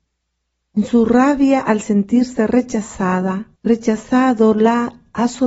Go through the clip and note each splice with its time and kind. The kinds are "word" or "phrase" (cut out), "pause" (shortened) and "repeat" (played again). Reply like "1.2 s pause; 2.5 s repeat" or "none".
3.6 s pause